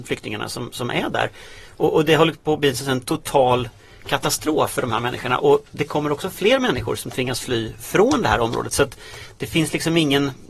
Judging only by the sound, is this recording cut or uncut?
uncut